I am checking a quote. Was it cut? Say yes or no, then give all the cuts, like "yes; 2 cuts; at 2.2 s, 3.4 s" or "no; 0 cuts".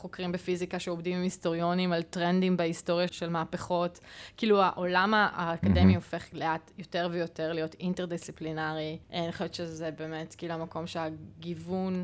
yes; 2 cuts; at 3.1 s, 9.0 s